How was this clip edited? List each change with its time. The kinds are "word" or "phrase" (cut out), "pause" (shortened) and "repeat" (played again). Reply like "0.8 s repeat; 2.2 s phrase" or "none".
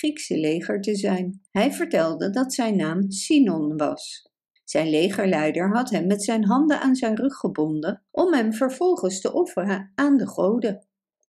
1.5 s pause; 4.6 s pause; 8.1 s pause